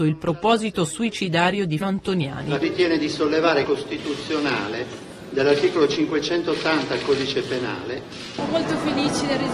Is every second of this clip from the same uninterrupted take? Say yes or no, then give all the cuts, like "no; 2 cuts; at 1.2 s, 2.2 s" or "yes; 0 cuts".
no; 3 cuts; at 1.8 s, 2.6 s, 3.6 s